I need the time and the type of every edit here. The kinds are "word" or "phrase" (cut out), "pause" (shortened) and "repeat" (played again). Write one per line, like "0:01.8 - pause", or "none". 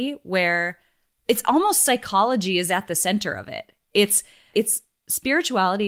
0:04.5 - word